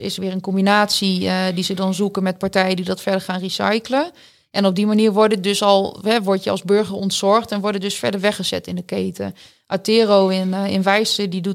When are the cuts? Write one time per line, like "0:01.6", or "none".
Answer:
none